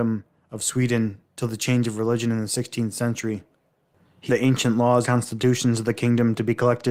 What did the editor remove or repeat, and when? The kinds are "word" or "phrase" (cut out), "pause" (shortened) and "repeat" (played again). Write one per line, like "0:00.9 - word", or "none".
0:04.3 - word
0:05.0 - word